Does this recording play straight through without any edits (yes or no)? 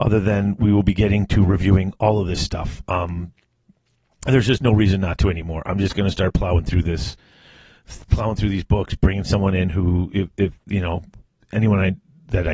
yes